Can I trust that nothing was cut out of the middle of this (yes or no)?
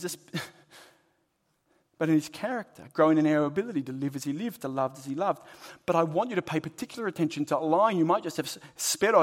yes